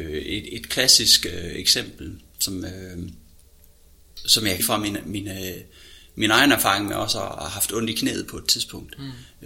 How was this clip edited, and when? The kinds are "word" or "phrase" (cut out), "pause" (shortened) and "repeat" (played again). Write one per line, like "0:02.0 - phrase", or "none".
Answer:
0:04.6 - phrase